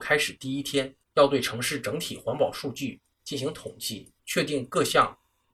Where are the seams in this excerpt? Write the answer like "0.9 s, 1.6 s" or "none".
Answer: 1.0 s, 4.2 s